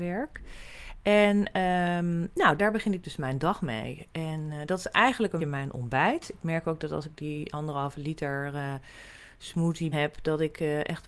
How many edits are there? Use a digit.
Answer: 3